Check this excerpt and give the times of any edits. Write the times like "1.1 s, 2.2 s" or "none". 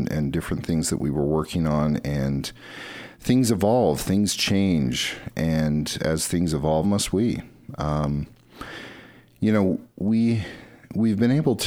6.8 s

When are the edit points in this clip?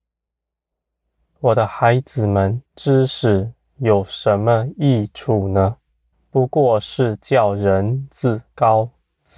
2.7 s, 6.1 s

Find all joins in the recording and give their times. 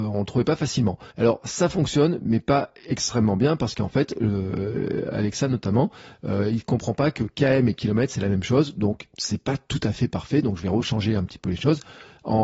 1.1 s

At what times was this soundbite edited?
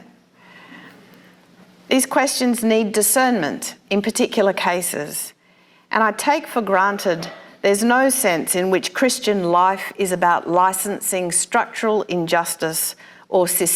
none

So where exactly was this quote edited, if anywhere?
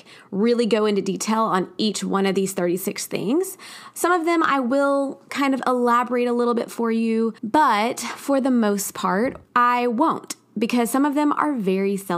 7.4 s, 9.4 s

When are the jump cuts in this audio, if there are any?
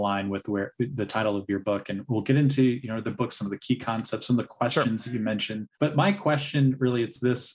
5.7 s

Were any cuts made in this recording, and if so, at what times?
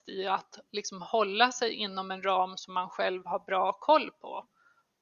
none

